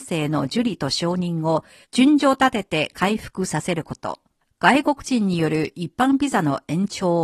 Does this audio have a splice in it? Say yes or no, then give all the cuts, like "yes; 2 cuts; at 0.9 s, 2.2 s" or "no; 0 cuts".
yes; 2 cuts; at 1.8 s, 4.4 s